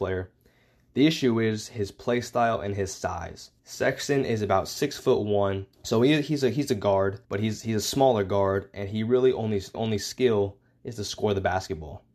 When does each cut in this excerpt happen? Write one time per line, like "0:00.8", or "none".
0:03.6
0:05.7
0:07.2
0:09.7

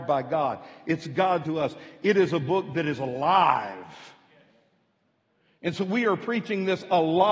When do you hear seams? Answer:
0:01.4

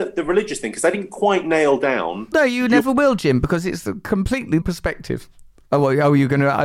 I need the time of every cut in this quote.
0:02.3
0:04.6

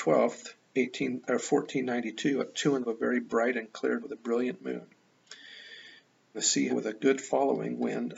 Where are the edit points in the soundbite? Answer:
0:02.8
0:04.0
0:06.3
0:06.7

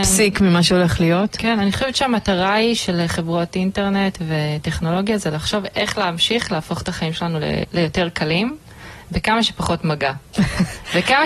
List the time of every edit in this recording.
none

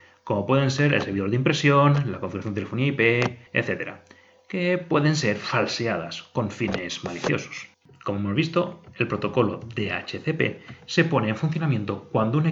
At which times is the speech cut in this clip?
0:03.5
0:07.7

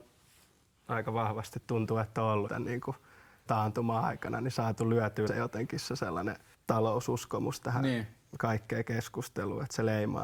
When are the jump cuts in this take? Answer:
0:02.5
0:03.5
0:05.3
0:06.5

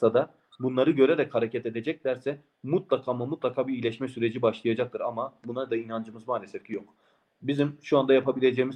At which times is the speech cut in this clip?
none

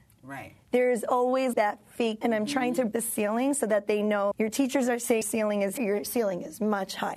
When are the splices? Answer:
0:01.5
0:02.2
0:02.9
0:04.3
0:05.2
0:05.8

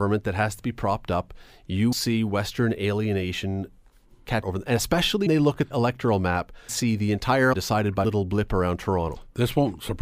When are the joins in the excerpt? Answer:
0:01.9
0:04.4
0:05.3
0:05.7
0:06.7
0:07.5
0:08.0

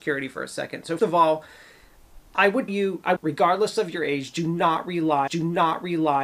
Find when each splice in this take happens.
0:01.0
0:02.3
0:02.7
0:03.2
0:05.3

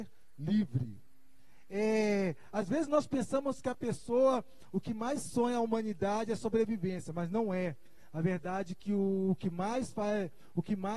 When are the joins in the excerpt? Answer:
none

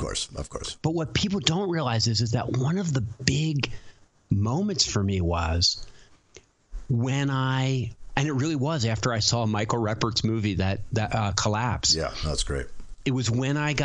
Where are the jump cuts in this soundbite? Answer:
none

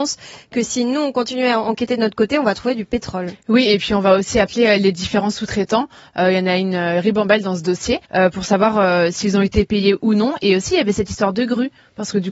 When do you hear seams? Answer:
0:08.0

